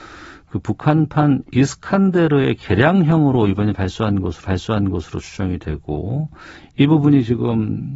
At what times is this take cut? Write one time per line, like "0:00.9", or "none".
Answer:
0:04.4